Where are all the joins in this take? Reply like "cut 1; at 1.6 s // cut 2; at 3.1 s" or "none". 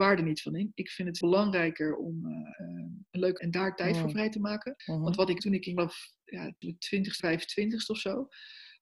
cut 1; at 1.2 s // cut 2; at 2.5 s // cut 3; at 3.4 s // cut 4; at 4.8 s // cut 5; at 5.4 s // cut 6; at 5.8 s // cut 7; at 6.6 s // cut 8; at 7.2 s